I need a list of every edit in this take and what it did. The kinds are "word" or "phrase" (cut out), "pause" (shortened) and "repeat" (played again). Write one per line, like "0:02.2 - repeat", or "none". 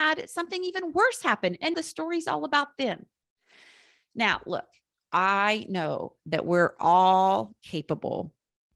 0:01.7 - word

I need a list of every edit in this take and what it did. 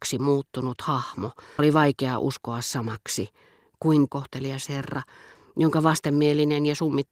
0:01.6 - word
0:04.1 - phrase

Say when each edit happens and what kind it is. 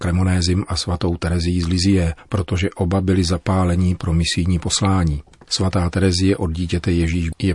none

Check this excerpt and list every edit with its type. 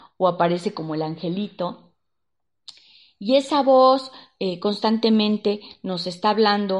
none

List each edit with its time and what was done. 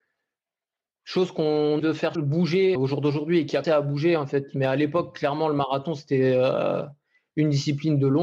0:01.8 - word
0:02.2 - word
0:02.8 - word
0:03.6 - word

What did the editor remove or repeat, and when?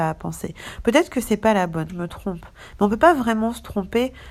0:01.9 - phrase

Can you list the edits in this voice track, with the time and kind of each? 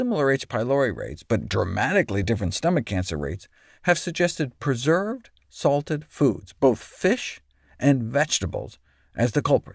none

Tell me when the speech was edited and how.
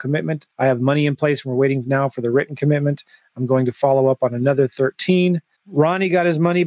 none

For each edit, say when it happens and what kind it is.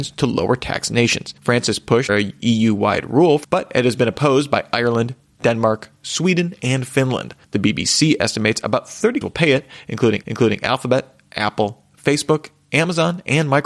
0:01.4 - pause
0:02.1 - word
0:03.4 - phrase
0:07.4 - pause
0:09.2 - word
0:10.2 - repeat

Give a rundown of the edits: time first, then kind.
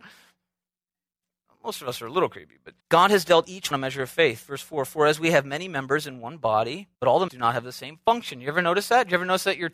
0:02.8 - pause
0:03.7 - word
0:06.9 - pause
0:07.3 - word

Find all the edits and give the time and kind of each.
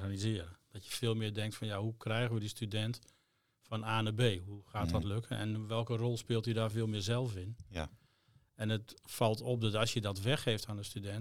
none

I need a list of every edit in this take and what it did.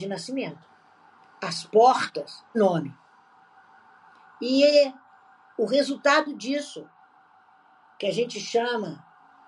0:02.5 - word

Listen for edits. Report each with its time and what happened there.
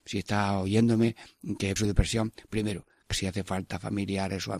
0:01.8 - word
0:03.1 - word

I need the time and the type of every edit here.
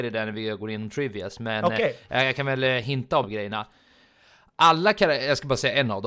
0:03.2 - word

